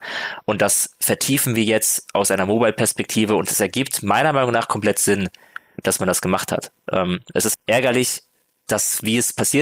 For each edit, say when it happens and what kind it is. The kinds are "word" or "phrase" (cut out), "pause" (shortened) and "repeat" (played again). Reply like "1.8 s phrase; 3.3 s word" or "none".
7.5 s word